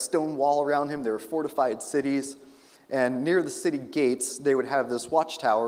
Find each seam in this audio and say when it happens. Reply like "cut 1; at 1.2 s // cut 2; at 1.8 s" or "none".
none

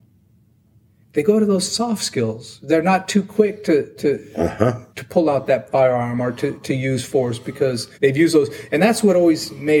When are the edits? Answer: cut 1; at 4.9 s // cut 2; at 7.9 s

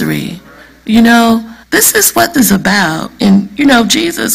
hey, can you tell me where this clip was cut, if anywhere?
cut 1; at 1.6 s // cut 2; at 2.3 s

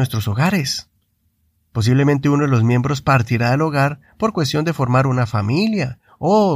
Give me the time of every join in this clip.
none

